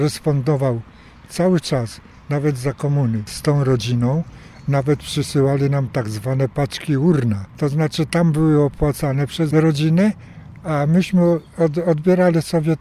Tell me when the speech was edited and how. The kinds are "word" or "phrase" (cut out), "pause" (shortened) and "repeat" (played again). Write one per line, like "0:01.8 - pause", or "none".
none